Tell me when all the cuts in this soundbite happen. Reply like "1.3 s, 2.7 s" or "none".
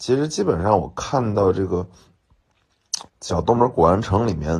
3.1 s

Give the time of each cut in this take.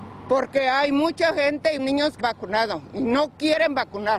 1.8 s, 2.2 s

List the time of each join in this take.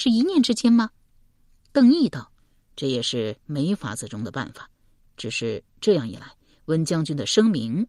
2.4 s

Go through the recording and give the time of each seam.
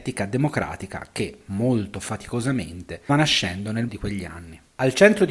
3.1 s, 3.9 s

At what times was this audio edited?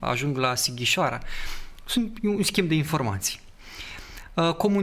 none

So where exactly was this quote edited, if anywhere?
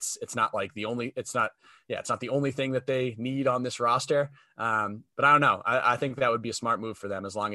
none

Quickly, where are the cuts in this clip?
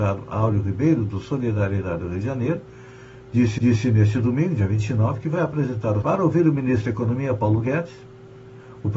3.6 s, 6.0 s

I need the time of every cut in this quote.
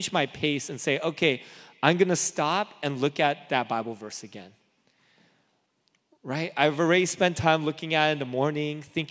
none

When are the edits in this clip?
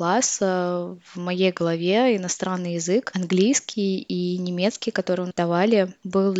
5.3 s

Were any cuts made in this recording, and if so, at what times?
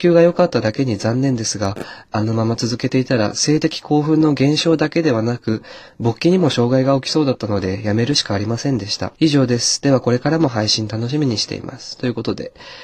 9.2 s

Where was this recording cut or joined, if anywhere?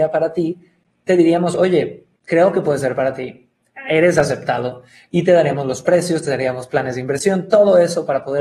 2.1 s

